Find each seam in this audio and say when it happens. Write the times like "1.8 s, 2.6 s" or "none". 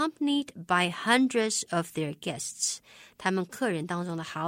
none